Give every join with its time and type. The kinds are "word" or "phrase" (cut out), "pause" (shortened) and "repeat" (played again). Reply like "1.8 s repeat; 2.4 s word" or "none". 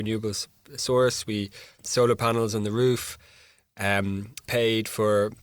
1.8 s word; 4.4 s word